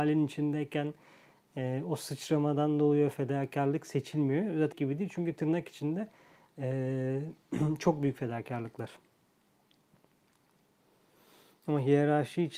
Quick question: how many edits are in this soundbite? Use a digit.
1